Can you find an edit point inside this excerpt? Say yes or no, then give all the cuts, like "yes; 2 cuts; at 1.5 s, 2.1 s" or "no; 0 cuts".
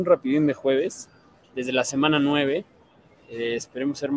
no; 0 cuts